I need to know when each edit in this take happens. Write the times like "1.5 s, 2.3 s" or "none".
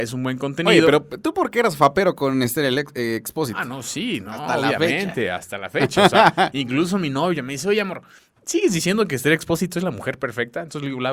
none